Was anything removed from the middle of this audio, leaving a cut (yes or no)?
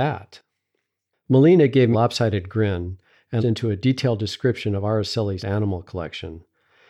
yes